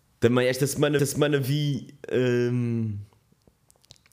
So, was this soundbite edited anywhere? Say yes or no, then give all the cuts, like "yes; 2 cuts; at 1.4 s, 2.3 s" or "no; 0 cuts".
yes; 1 cut; at 1.0 s